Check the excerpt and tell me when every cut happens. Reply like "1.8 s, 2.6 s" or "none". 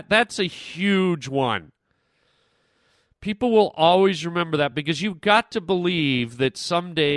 none